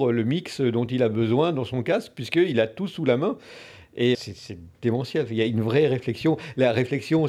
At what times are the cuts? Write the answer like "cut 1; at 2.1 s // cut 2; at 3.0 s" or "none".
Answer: cut 1; at 4.1 s